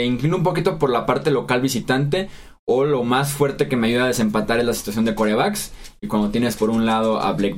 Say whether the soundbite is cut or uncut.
uncut